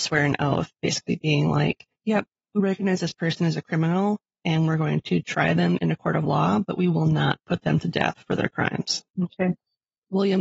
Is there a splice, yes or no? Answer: yes